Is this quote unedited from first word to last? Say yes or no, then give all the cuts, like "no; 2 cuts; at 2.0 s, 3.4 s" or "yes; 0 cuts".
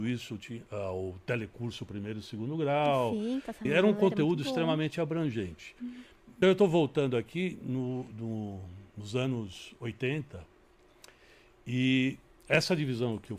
no; 2 cuts; at 3.7 s, 6.4 s